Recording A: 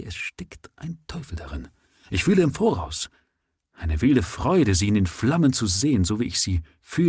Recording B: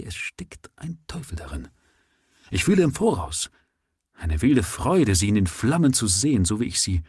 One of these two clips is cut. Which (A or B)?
A